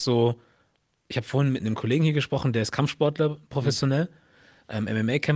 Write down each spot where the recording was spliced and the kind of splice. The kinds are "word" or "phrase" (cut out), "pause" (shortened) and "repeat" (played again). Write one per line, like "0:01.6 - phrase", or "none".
none